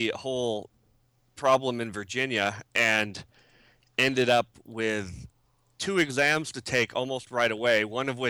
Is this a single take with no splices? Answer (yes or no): yes